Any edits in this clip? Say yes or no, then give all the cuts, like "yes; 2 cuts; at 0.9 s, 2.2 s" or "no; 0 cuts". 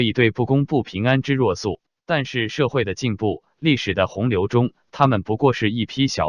yes; 1 cut; at 1.9 s